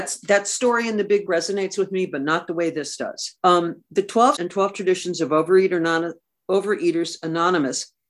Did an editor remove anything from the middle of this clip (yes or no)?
yes